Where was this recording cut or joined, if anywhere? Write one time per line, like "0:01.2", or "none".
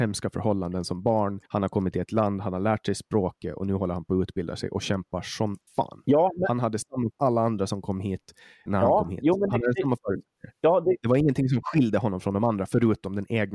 0:01.5
0:02.0
0:05.7
0:07.1
0:08.7